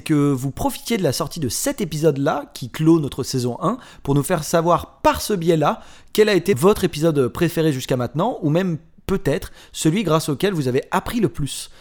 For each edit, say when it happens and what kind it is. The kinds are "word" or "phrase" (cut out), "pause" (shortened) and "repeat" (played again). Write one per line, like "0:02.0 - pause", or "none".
none